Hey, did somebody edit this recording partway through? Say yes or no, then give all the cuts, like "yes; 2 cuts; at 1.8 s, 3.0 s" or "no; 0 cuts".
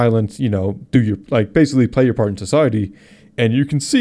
no; 0 cuts